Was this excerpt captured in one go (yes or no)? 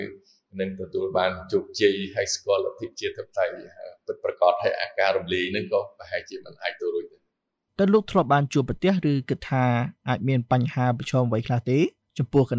yes